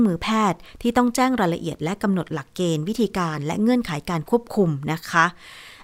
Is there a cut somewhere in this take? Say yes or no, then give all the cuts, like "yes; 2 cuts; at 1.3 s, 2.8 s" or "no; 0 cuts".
no; 0 cuts